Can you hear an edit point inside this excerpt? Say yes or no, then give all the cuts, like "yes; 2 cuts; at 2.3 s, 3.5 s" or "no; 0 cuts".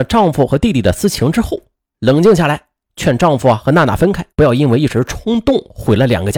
yes; 2 cuts; at 1.8 s, 4.3 s